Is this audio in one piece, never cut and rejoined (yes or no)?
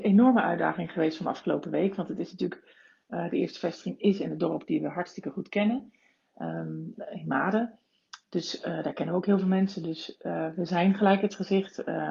yes